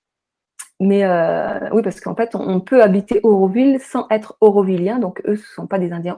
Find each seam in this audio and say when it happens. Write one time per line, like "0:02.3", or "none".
none